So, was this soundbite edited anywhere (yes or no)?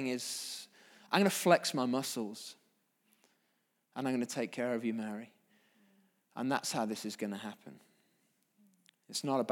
no